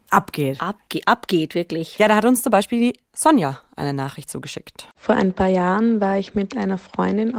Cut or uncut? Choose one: cut